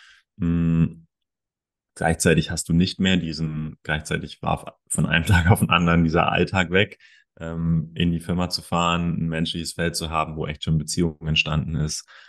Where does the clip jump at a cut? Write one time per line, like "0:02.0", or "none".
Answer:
none